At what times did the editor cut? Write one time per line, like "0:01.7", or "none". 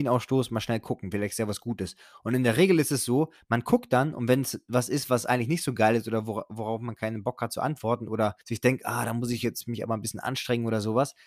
0:08.4